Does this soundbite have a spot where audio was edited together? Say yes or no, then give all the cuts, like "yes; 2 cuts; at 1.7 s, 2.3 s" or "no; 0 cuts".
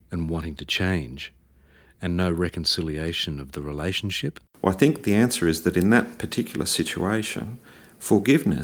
no; 0 cuts